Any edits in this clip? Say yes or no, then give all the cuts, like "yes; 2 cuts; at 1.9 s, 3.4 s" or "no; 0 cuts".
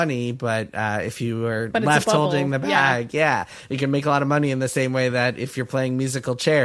no; 0 cuts